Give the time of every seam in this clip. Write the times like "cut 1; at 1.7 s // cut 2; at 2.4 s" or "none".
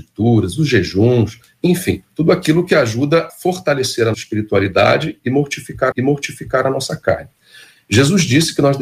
cut 1; at 2.1 s // cut 2; at 3.3 s // cut 3; at 4.1 s // cut 4; at 5.9 s